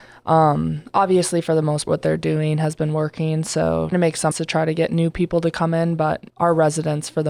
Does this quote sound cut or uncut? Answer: cut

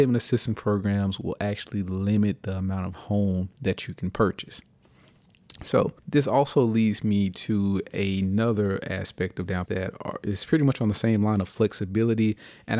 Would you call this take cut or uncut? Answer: cut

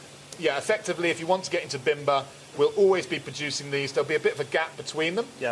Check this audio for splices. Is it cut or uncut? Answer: uncut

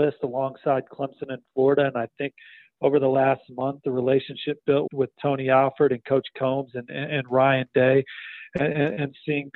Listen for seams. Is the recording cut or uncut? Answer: cut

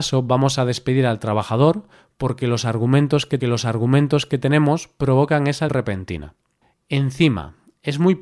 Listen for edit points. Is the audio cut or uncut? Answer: cut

